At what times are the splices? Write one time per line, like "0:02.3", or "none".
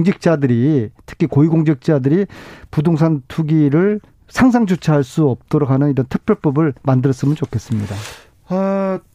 0:04.1
0:06.8